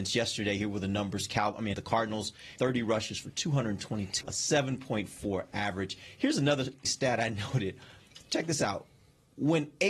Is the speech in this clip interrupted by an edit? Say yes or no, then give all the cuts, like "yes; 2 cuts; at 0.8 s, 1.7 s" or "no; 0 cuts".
yes; 4 cuts; at 1.7 s, 2.6 s, 4.2 s, 6.8 s